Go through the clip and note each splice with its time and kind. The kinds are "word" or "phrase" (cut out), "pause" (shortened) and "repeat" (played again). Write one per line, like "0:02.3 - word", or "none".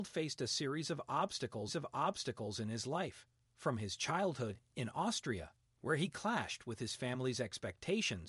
0:01.7 - repeat